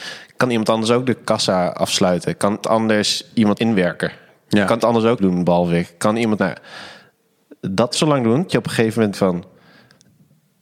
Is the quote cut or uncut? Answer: cut